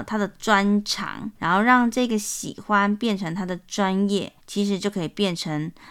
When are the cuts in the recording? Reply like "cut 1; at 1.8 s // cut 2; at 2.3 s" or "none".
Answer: cut 1; at 1.3 s // cut 2; at 4.4 s